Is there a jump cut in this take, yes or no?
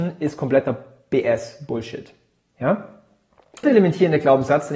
yes